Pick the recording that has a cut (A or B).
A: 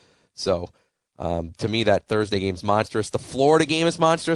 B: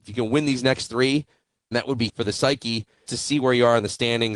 B